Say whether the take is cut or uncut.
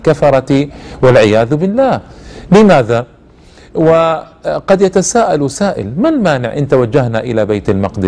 uncut